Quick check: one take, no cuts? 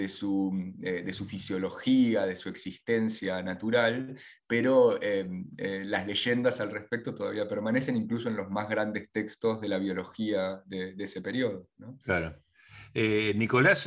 yes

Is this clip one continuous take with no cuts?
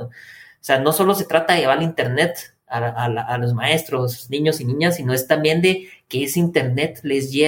yes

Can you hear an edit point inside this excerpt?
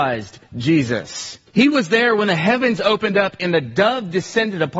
yes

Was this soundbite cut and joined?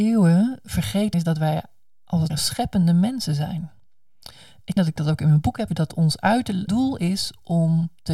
yes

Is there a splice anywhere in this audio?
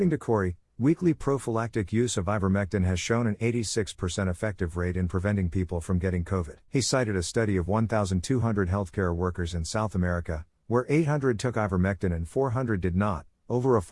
yes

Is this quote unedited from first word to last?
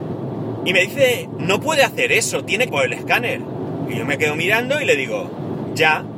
no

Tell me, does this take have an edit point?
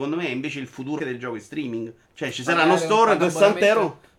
yes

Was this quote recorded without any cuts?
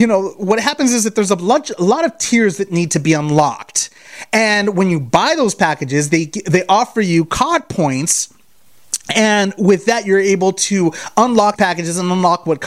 no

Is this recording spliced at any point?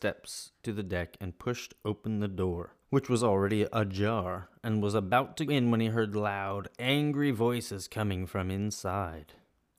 yes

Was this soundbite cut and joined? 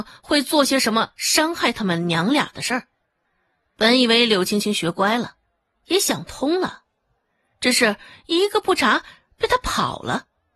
no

